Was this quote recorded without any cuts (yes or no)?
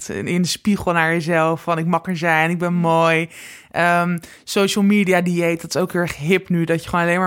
yes